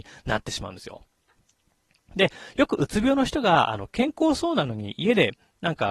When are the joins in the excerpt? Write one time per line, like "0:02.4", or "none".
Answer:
none